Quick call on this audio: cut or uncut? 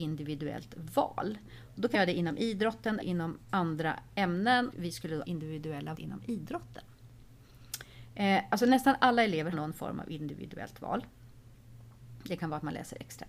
cut